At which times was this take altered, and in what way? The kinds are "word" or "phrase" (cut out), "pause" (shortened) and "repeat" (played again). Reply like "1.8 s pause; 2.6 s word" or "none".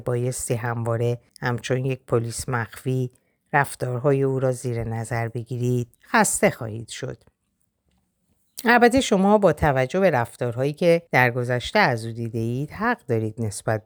1.3 s pause; 5.9 s pause; 11.1 s pause